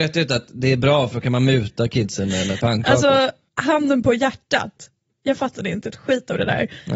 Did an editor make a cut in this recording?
no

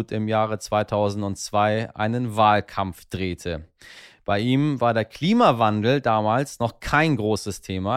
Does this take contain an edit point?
no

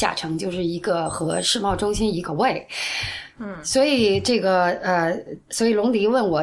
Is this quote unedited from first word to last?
no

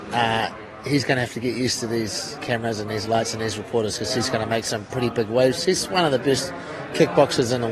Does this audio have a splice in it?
no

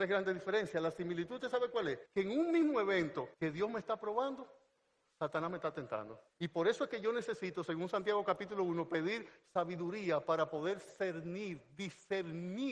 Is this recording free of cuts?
no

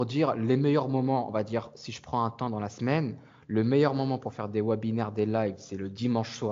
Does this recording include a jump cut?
no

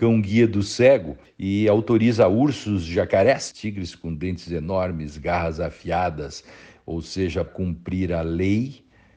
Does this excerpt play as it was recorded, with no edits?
no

